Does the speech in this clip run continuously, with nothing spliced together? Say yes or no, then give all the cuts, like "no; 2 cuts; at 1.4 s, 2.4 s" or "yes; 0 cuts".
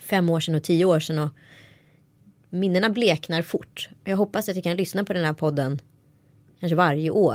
yes; 0 cuts